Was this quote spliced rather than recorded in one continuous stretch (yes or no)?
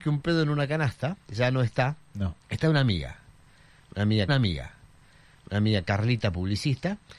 yes